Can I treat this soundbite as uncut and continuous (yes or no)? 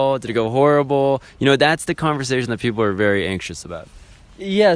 yes